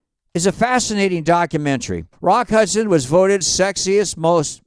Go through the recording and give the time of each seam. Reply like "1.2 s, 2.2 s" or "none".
2.1 s, 3.4 s